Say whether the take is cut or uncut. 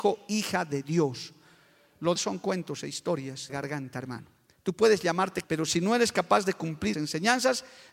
cut